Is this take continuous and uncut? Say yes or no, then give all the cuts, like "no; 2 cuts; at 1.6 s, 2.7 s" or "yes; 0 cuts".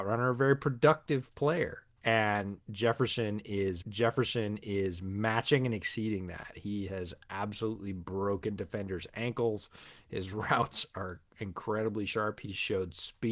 no; 1 cut; at 3.8 s